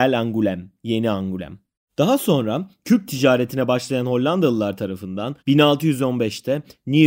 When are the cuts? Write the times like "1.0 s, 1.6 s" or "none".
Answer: 1.7 s, 5.4 s